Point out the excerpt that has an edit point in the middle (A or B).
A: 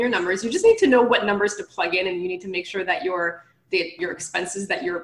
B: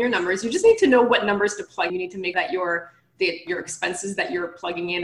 B